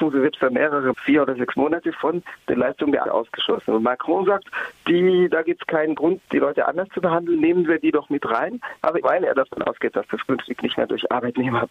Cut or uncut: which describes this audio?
cut